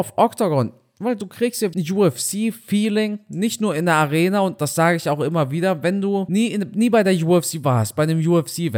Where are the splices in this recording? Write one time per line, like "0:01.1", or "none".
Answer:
0:01.7

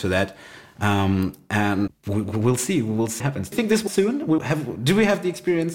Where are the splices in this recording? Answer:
0:01.9
0:03.2
0:03.5
0:03.9
0:04.4

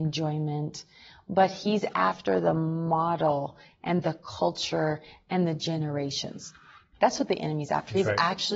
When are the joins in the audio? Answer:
none

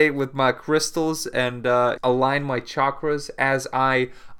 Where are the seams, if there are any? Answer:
0:02.0

